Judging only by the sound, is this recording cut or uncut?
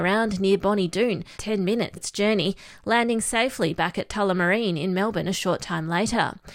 cut